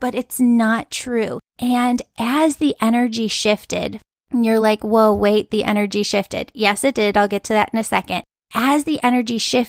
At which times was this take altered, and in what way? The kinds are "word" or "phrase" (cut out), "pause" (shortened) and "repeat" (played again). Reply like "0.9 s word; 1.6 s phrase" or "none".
none